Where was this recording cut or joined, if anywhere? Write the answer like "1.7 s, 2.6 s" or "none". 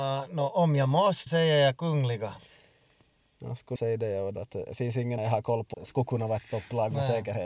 1.3 s, 3.8 s, 4.3 s, 5.2 s, 5.7 s

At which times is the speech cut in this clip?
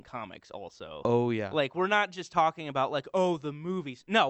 none

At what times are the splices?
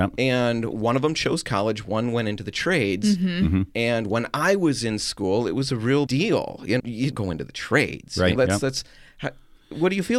6.1 s, 6.8 s, 7.1 s, 8.4 s

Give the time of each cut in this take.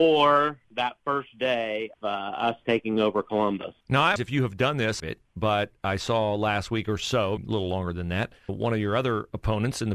1.9 s, 3.8 s, 4.2 s, 5.0 s, 7.4 s, 8.5 s

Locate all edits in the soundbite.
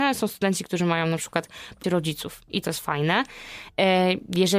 1.8 s, 2.6 s

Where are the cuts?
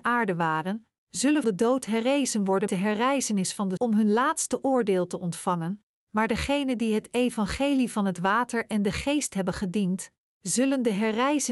1.4 s, 2.7 s, 3.8 s

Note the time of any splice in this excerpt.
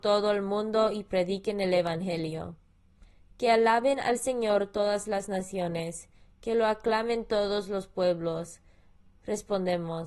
none

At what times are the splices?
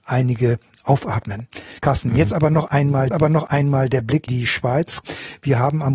1.8 s, 3.1 s, 4.3 s

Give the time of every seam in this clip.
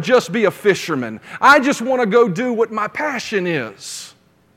none

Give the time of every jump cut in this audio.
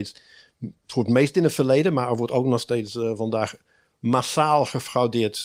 none

